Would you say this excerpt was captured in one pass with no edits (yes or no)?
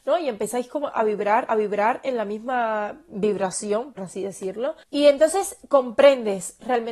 no